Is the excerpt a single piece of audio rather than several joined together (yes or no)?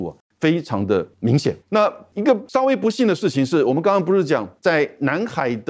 no